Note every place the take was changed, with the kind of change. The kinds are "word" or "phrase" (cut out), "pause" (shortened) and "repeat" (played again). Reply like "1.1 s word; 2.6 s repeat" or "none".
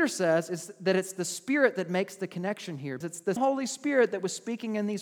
3.0 s word; 3.4 s word